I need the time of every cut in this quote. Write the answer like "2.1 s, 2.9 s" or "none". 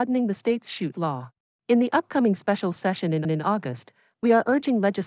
0.9 s, 1.5 s, 3.2 s

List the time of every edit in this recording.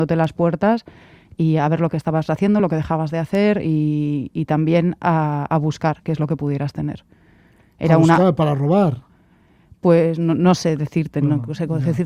none

